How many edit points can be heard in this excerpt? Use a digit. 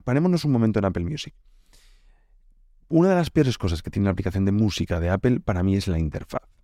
0